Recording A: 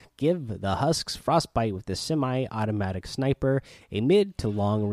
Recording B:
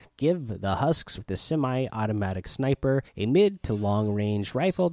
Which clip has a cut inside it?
B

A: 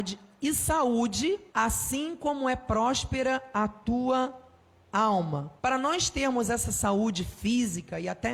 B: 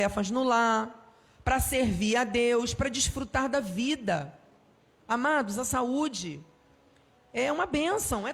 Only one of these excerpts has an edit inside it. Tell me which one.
A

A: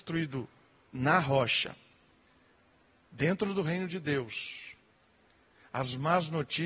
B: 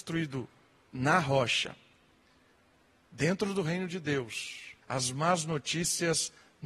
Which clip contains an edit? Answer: B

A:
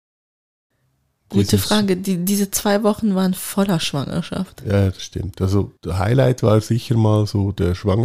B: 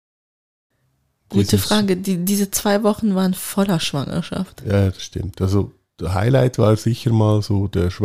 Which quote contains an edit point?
A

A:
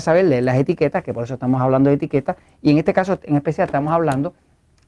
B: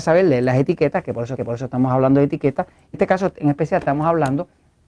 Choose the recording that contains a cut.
B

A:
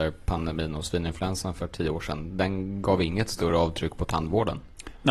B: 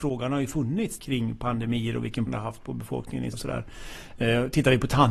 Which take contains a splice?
B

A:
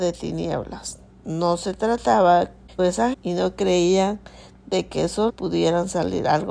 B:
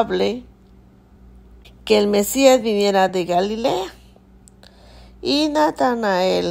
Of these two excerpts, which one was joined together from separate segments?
A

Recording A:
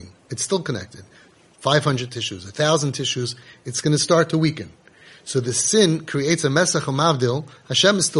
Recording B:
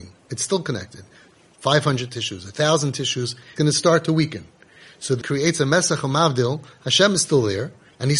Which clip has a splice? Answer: B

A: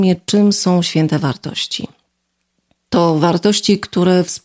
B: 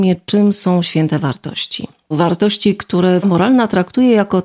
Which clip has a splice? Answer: B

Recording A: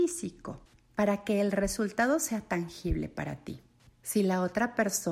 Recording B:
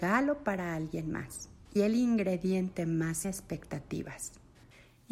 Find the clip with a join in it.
B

